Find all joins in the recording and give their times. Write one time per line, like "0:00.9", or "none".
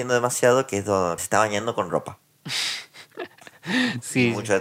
0:01.2